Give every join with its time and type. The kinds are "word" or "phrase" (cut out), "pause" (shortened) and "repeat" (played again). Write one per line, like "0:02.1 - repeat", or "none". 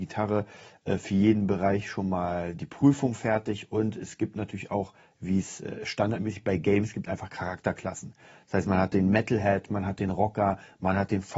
none